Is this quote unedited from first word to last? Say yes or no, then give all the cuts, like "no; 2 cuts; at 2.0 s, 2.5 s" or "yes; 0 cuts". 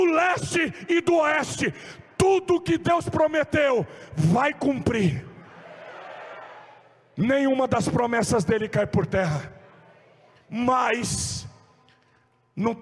yes; 0 cuts